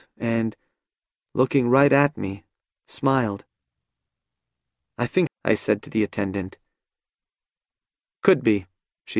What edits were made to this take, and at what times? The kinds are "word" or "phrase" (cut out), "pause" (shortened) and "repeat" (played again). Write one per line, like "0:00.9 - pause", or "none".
0:05.3 - phrase